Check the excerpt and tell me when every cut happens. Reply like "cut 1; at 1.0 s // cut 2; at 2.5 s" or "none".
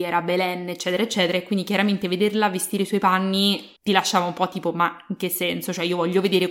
cut 1; at 3.8 s